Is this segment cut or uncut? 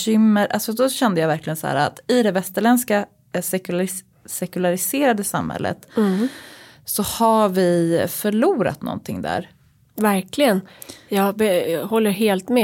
uncut